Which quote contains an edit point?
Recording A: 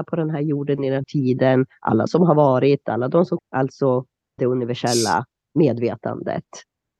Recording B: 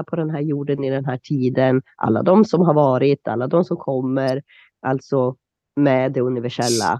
A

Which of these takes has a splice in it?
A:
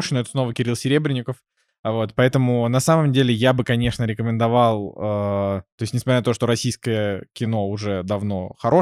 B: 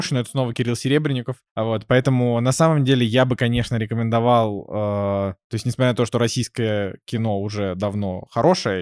B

